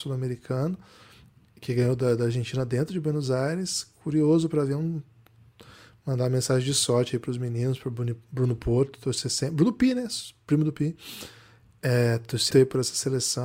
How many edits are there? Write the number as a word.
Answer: one